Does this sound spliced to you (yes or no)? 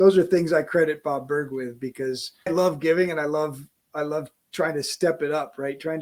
yes